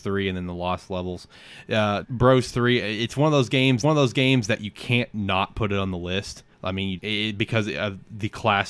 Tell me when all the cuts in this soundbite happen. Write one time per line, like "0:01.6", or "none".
0:02.0
0:03.8
0:06.5
0:07.0